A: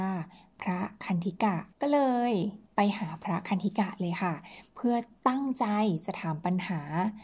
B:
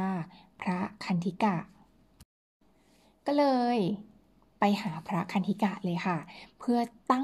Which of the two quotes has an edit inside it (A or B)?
A